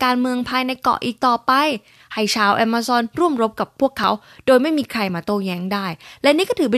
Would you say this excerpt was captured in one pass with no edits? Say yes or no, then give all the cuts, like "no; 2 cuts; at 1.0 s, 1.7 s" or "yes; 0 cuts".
yes; 0 cuts